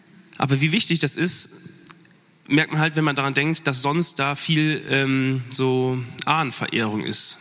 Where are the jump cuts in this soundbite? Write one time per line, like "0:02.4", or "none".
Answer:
none